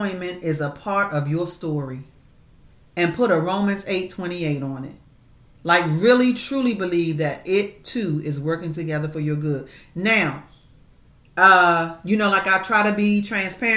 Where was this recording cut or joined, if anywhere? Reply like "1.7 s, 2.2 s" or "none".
none